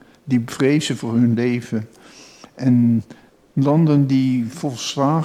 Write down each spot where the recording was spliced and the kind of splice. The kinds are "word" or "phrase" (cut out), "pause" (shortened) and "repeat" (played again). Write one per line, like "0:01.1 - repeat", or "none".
0:03.3 - pause